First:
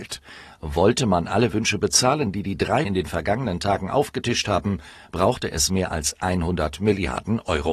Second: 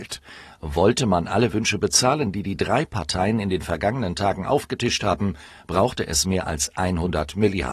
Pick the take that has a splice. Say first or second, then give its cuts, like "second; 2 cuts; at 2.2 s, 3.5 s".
first; 1 cut; at 2.9 s